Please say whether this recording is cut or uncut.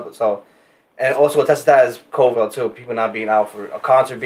cut